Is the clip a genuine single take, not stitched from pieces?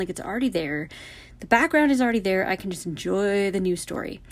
yes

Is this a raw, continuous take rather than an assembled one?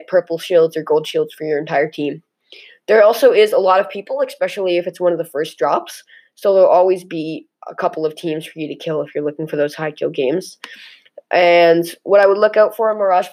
yes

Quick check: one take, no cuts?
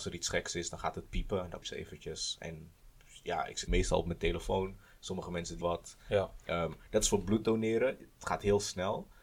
no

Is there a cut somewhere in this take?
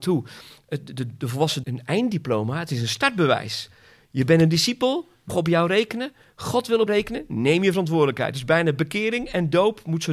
yes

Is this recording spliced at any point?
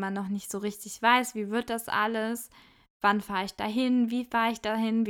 no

